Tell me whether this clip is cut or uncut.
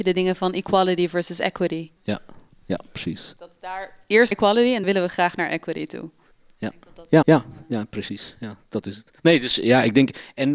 cut